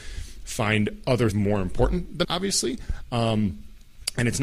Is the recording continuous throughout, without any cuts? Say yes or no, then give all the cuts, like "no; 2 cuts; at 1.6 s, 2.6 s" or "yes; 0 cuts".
no; 2 cuts; at 1.3 s, 2.2 s